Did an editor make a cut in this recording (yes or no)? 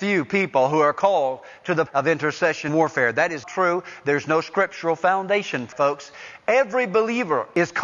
yes